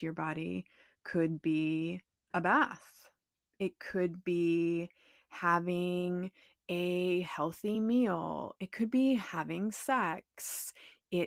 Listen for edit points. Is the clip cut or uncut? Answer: uncut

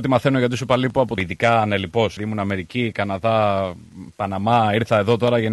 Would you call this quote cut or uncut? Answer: cut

